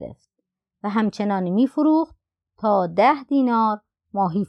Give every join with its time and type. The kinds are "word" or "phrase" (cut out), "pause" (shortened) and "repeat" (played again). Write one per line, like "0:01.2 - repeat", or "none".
none